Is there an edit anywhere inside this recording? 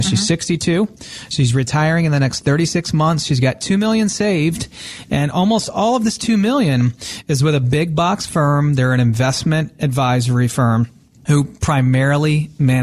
no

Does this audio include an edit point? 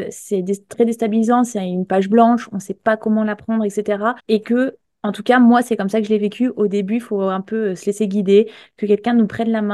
yes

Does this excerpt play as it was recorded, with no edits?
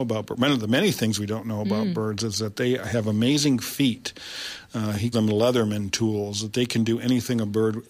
no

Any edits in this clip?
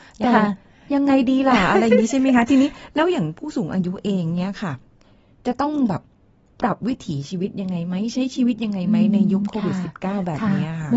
no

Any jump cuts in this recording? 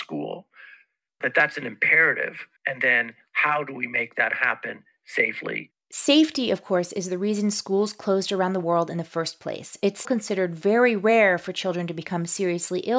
yes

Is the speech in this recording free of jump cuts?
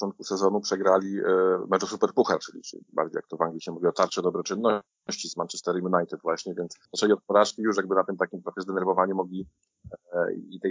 no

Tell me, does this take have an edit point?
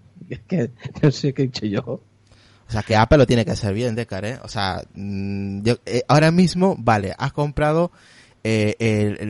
no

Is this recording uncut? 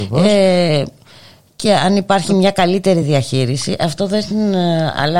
yes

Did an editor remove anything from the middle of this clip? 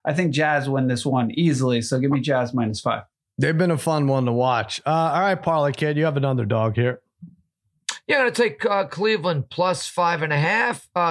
no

